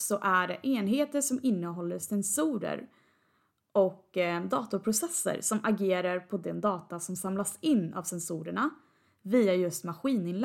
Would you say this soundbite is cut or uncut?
uncut